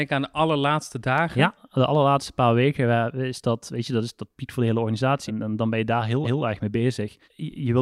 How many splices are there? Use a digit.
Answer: 2